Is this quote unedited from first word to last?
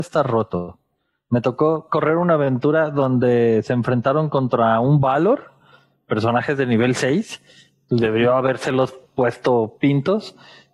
yes; 0 cuts

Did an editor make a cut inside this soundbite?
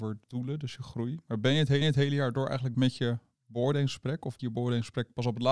yes; 3 cuts; at 1.8 s, 2.7 s, 4.4 s

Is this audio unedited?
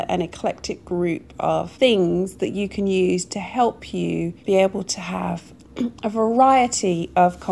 no; 2 cuts; at 1.7 s, 4.4 s

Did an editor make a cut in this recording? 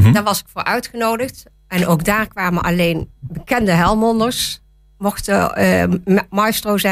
no; 0 cuts

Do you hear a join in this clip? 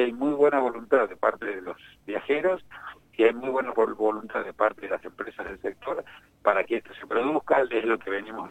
no; 0 cuts

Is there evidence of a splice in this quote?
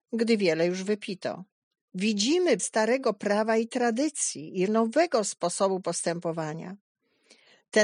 yes; 2 cuts; at 2.6 s, 4.7 s

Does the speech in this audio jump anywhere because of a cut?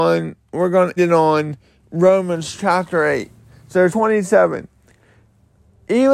yes; 2 cuts; at 1.0 s, 3.9 s

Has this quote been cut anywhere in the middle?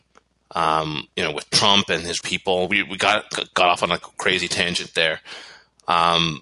yes; 2 cuts; at 1.1 s, 2.2 s

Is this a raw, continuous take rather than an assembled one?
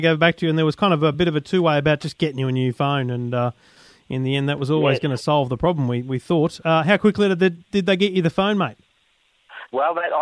yes; 0 cuts

